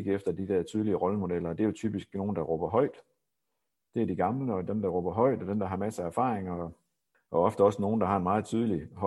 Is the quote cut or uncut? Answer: uncut